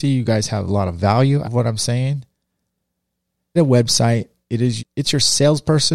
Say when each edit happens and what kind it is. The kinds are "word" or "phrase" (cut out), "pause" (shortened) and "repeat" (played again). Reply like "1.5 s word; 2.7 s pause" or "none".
1.4 s word; 3.6 s word; 4.8 s word